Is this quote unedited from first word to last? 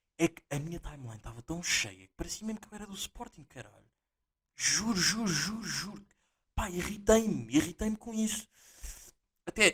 yes; 0 cuts

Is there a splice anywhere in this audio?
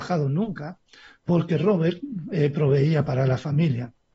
no; 0 cuts

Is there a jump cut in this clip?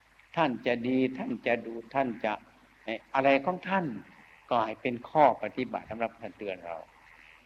no; 0 cuts

